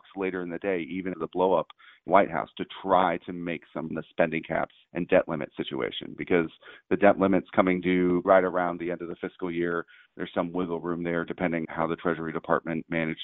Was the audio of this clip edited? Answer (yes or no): yes